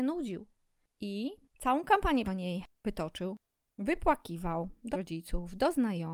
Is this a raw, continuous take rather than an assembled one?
no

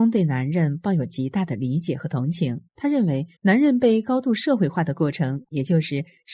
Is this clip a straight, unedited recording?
no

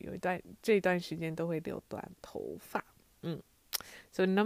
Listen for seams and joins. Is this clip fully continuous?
yes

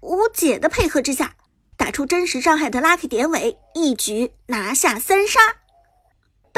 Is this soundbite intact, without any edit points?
yes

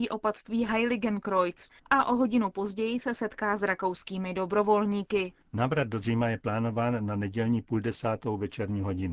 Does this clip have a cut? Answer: yes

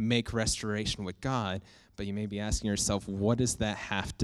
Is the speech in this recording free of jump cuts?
yes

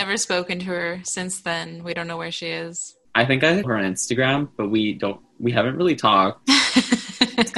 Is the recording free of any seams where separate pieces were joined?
no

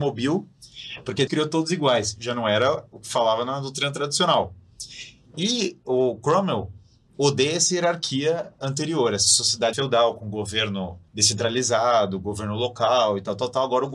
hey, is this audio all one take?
no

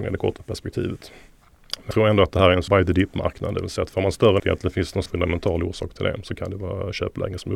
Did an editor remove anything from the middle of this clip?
yes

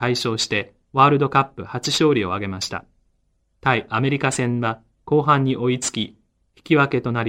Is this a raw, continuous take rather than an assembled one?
yes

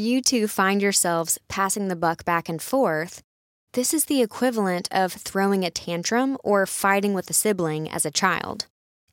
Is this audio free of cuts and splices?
yes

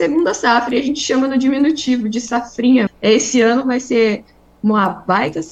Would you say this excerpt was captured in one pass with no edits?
no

